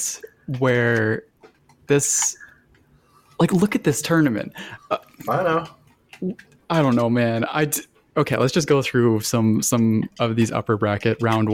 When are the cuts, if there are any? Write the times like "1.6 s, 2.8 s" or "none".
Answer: none